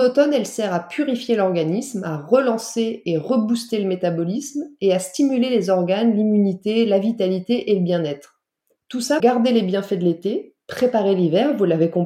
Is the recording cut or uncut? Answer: cut